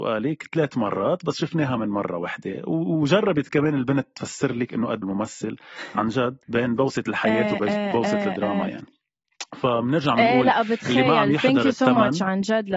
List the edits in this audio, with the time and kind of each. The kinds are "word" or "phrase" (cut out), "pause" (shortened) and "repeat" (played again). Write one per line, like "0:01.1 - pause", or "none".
0:05.0 - word
0:06.4 - pause